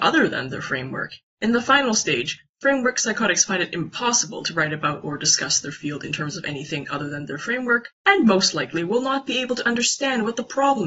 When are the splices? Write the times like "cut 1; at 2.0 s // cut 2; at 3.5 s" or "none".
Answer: cut 1; at 7.9 s